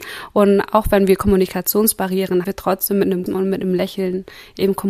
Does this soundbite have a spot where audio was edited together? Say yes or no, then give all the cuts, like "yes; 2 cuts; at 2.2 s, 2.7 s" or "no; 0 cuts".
yes; 2 cuts; at 2.4 s, 3.3 s